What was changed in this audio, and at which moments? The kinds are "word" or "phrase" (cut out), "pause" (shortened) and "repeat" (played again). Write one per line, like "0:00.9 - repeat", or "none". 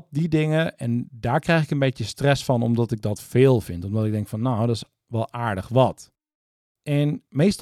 none